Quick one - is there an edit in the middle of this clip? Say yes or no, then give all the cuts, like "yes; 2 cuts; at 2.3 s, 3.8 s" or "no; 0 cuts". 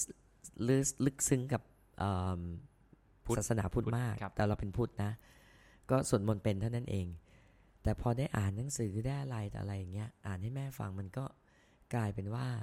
no; 0 cuts